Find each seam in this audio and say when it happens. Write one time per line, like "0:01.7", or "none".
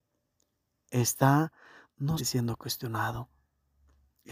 0:02.2

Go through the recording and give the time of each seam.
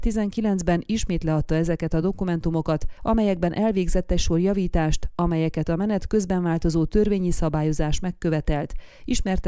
none

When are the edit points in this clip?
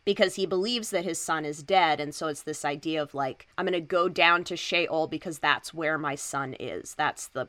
0:03.5

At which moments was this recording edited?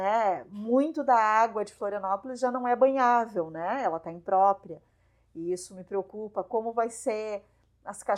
none

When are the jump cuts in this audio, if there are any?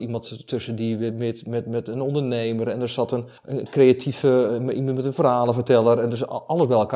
0:03.4

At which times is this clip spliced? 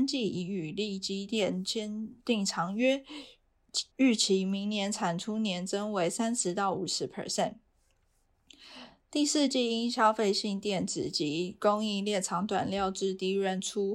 0:03.9

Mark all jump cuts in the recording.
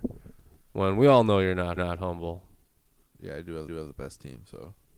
0:01.8
0:03.7

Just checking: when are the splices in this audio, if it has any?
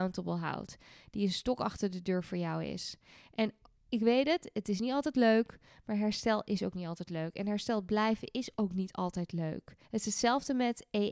0:09.8

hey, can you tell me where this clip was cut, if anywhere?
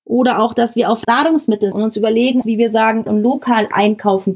0:01.0
0:01.7
0:02.4
0:03.1

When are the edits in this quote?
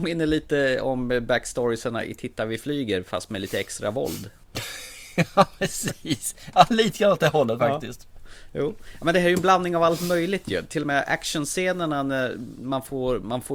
none

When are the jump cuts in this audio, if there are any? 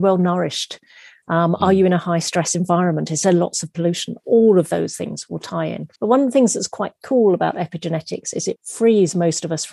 0:06.0
0:08.6

